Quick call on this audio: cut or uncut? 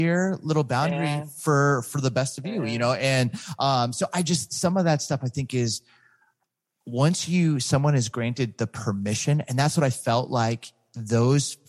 uncut